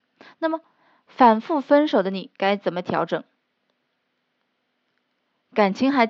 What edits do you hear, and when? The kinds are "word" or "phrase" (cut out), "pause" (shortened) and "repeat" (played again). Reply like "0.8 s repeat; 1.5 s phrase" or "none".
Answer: none